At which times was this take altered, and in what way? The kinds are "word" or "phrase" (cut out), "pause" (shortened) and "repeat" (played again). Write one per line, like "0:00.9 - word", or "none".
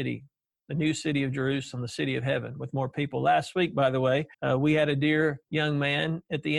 0:04.3 - pause
0:05.4 - pause

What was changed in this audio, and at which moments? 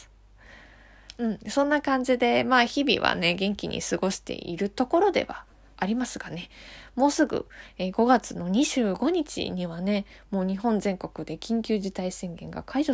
none

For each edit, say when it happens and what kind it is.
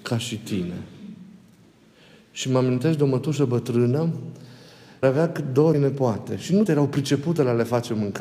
0:05.0 - word
0:05.7 - word
0:06.7 - word

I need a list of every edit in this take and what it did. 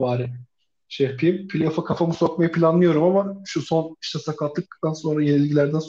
none

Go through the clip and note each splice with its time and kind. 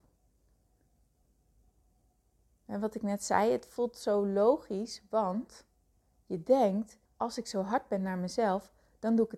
0:07.1 - pause

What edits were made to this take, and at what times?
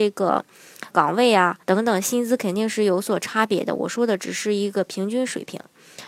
0:00.9 - phrase
0:01.6 - pause

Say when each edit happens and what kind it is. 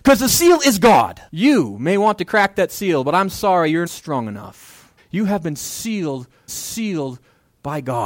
0:01.3 - pause
0:03.9 - word
0:05.0 - pause
0:06.5 - repeat

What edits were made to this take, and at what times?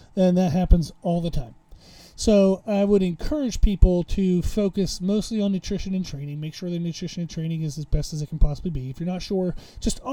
none

